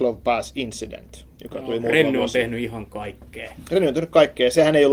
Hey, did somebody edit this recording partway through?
no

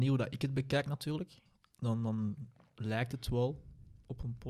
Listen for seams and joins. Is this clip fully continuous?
yes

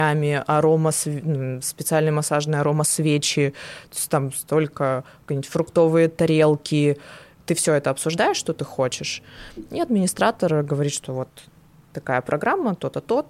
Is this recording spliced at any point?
no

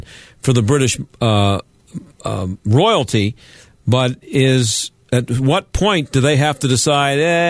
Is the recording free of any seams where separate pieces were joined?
yes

